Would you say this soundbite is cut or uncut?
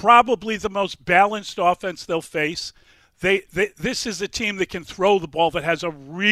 uncut